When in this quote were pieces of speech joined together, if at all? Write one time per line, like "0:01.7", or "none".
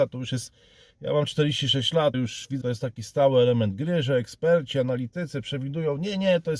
0:02.1
0:02.6

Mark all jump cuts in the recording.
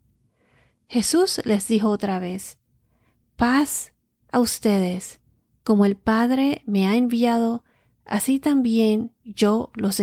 none

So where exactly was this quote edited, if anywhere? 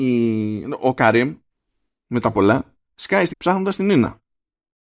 0:02.8
0:03.3

